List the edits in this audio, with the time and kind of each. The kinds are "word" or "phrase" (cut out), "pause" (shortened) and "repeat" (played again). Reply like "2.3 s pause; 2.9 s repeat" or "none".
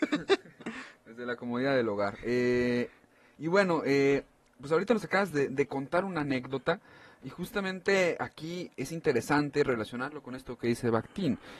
none